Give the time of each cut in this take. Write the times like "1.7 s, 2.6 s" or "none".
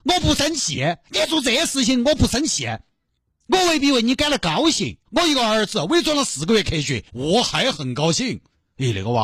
1.0 s, 5.0 s, 7.1 s